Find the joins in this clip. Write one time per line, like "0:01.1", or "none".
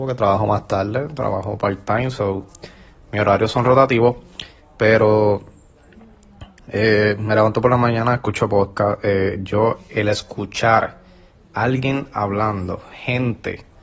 none